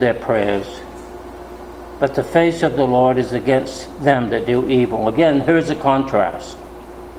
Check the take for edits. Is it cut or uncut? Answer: uncut